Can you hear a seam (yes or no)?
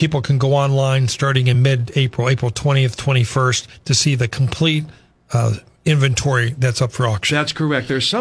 no